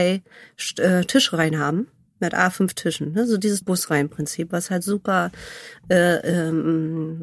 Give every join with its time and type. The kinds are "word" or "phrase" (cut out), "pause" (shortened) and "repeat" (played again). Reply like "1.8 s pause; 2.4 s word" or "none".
2.1 s pause; 3.6 s word